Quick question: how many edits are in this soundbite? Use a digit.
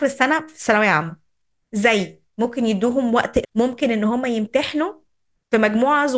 1